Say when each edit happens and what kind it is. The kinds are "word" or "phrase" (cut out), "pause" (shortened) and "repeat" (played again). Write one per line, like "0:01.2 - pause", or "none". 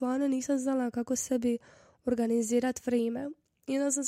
none

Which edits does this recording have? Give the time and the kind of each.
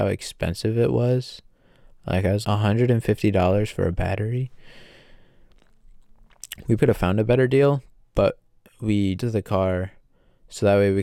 0:02.4 - word
0:06.8 - word
0:09.2 - word

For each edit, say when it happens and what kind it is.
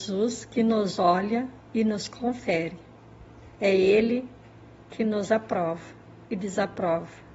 0:01.6 - pause

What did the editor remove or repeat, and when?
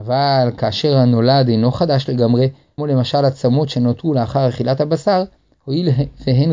0:02.8 - word

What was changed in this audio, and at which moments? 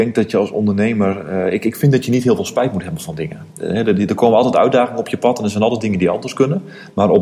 none

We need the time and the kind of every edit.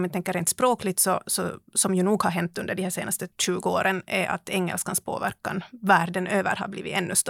0:03.3 - pause

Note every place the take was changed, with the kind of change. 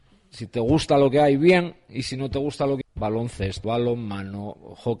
0:02.8 - word
0:03.6 - word

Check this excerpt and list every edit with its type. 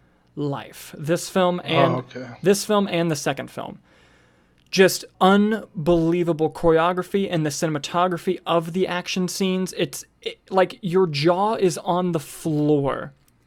0:05.1 - pause

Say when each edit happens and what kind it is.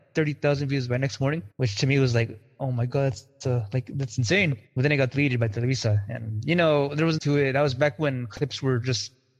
0:01.5 - pause
0:04.7 - pause
0:07.2 - phrase

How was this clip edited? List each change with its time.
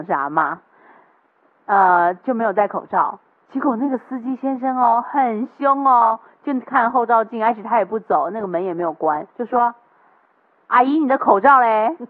0:09.3 - pause

